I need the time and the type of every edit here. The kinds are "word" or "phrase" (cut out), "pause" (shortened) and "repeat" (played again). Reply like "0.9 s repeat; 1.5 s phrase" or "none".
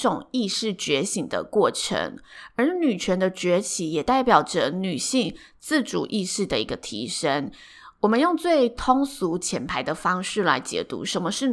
none